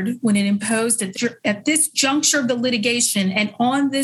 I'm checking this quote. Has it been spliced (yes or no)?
yes